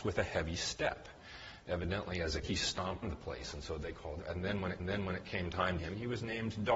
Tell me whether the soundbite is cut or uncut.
cut